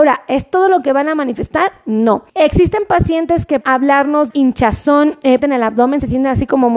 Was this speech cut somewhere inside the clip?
yes; 4 cuts; at 2.3 s, 3.6 s, 4.3 s, 5.4 s

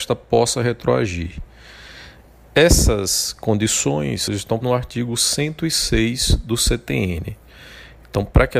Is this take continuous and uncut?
no; 2 cuts; at 4.3 s, 4.6 s

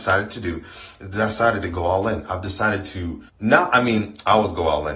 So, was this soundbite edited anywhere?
yes; 1 cut; at 3.3 s

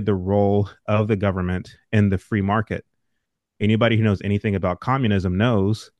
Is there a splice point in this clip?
no; 0 cuts

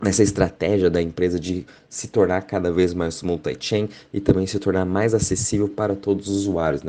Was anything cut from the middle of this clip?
no; 0 cuts

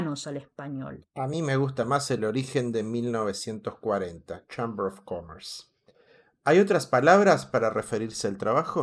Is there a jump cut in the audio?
no; 0 cuts

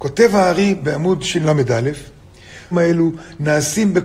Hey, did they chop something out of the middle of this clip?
yes; 1 cut; at 2.7 s

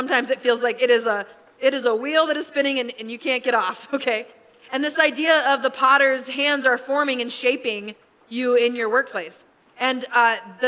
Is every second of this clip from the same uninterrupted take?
yes; 0 cuts

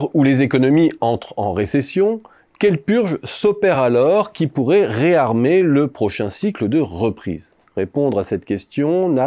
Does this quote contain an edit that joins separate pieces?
no; 0 cuts

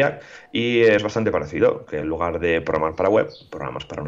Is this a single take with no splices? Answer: yes; 0 cuts

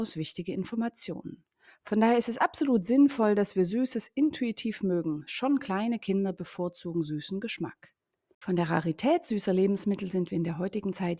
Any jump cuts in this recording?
no; 0 cuts

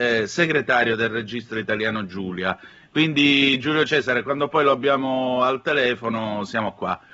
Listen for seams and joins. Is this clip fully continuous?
yes; 0 cuts

